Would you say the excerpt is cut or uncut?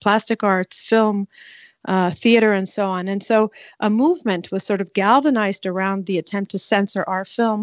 uncut